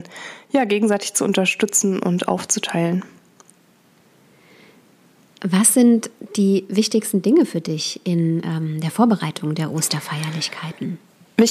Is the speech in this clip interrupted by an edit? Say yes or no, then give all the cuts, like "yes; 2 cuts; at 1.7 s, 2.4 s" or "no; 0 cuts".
no; 0 cuts